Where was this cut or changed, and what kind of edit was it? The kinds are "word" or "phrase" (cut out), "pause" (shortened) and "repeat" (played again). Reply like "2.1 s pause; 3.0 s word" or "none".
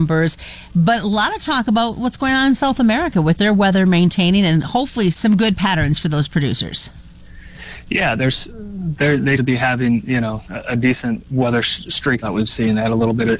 5.1 s word; 9.4 s word; 12.2 s word